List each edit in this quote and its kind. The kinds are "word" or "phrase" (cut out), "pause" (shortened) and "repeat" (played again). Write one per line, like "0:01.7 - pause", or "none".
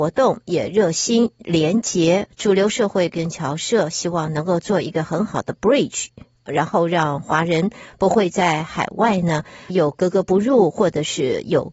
0:09.7 - word